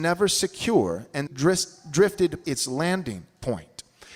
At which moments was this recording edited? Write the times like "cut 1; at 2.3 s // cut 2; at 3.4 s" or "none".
cut 1; at 1.3 s // cut 2; at 2.4 s